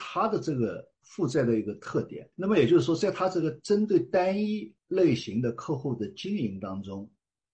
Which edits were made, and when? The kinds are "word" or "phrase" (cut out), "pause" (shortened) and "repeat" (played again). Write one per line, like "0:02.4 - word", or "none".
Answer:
0:02.3 - pause